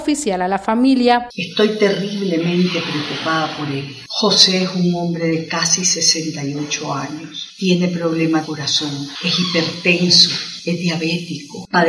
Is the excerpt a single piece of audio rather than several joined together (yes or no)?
no